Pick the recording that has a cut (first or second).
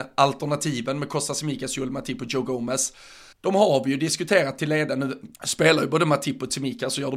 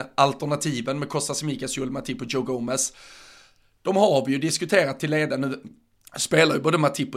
first